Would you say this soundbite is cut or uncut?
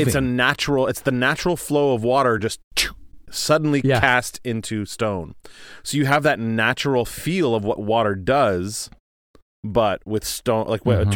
uncut